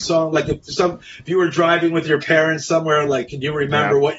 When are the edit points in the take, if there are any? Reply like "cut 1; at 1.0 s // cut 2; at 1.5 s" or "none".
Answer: none